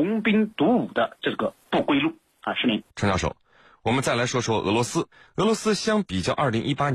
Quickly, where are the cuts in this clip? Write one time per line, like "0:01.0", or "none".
0:02.9